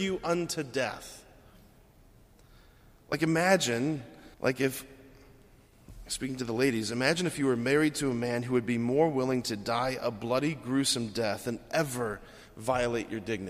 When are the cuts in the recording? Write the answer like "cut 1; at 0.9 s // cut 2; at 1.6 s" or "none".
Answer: cut 1; at 4.3 s